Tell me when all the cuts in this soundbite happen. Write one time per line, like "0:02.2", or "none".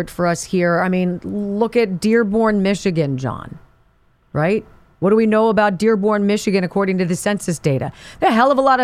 none